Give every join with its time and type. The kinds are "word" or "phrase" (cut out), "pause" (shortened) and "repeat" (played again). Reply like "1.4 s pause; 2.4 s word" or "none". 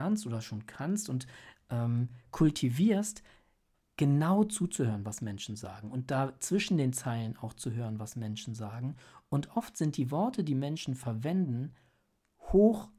none